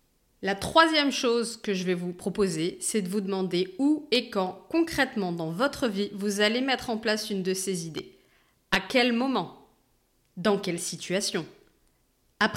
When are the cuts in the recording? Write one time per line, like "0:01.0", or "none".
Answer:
none